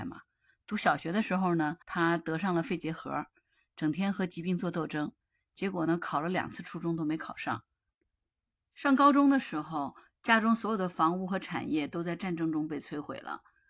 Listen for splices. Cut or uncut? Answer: cut